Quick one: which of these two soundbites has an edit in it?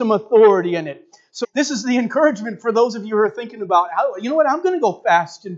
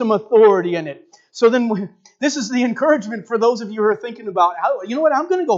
first; 1 cut; at 1.4 s

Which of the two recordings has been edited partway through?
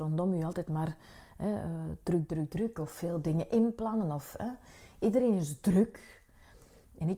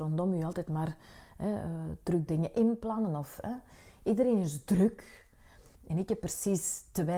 second; 2 cuts; at 2.3 s, 5.8 s

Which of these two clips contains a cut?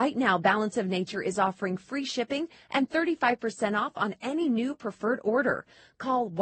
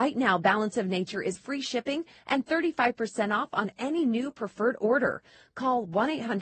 second; 1 cut; at 1.3 s

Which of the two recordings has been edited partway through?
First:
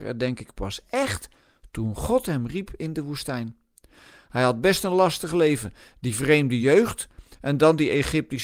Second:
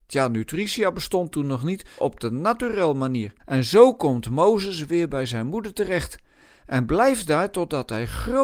second; 2 cuts; at 2.0 s, 3.4 s

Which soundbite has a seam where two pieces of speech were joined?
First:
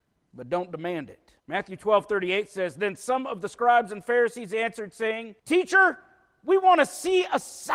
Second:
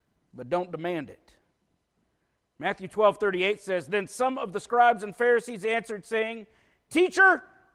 first; 2 cuts; at 1.4 s, 5.4 s

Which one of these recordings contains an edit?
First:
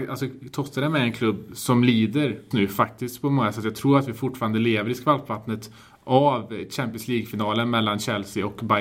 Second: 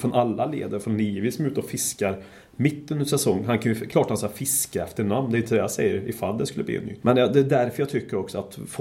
first; 1 cut; at 2.5 s

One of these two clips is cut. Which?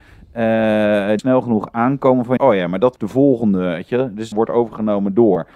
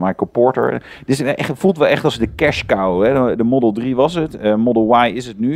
first; 4 cuts; at 1.2 s, 2.4 s, 3.0 s, 4.3 s

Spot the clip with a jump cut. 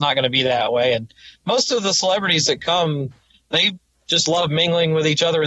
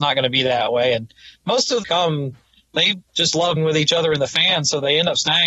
second; 3 cuts; at 1.8 s, 3.1 s, 3.6 s

